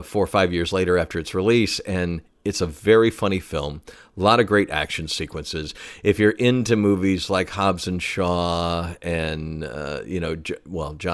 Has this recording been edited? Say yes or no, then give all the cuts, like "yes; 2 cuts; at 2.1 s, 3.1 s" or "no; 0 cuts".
no; 0 cuts